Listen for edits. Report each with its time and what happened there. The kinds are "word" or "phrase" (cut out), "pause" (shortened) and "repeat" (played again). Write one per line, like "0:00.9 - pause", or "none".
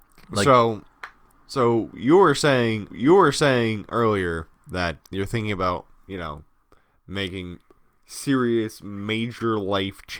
0:02.9 - repeat
0:05.0 - word